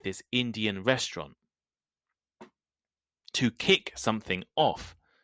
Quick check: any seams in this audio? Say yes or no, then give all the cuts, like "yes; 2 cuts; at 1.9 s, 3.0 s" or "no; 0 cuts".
no; 0 cuts